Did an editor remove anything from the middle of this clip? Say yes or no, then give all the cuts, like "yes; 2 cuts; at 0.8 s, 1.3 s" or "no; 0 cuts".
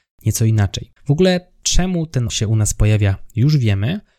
yes; 2 cuts; at 1.0 s, 2.3 s